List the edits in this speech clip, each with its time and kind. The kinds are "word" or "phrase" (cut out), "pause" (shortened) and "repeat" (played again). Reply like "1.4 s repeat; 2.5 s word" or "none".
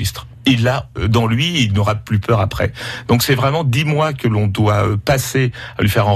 none